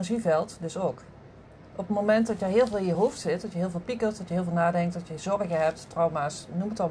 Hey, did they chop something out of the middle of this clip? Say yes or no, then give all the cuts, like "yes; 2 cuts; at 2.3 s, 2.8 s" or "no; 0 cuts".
no; 0 cuts